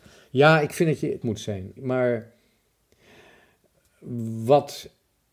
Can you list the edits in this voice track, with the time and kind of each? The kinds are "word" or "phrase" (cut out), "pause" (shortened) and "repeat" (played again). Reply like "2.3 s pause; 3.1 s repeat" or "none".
1.2 s word; 1.8 s word